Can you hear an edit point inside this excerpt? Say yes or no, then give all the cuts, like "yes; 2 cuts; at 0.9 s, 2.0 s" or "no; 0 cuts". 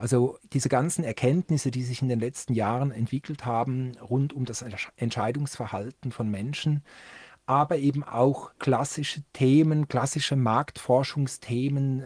yes; 1 cut; at 8.5 s